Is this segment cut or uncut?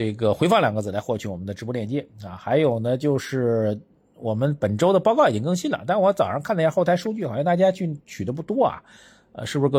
uncut